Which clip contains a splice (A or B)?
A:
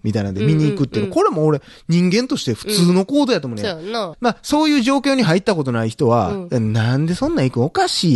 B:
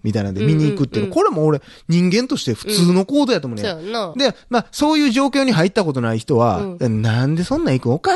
A